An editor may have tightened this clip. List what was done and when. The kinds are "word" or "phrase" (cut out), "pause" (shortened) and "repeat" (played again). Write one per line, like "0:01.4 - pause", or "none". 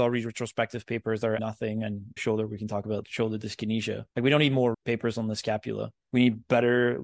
0:01.4 - word
0:02.2 - phrase
0:03.0 - word
0:04.1 - pause
0:04.7 - word
0:06.0 - pause